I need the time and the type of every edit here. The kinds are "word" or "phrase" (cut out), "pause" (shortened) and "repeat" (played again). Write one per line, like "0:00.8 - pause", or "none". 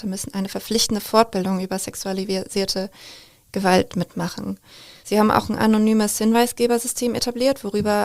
none